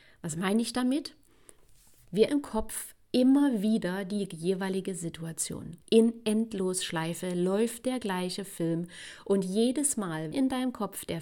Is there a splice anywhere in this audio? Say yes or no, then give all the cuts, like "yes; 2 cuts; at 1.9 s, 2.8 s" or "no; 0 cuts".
yes; 3 cuts; at 2.3 s, 5.8 s, 10.3 s